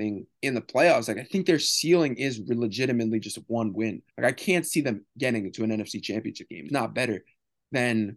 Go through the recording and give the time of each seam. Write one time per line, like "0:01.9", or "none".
0:04.1
0:06.7